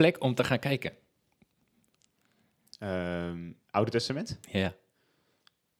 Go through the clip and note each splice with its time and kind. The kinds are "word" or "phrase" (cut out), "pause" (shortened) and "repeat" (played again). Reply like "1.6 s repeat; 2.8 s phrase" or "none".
3.6 s pause; 4.4 s pause